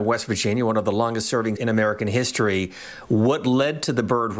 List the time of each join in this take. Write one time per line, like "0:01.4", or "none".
0:01.6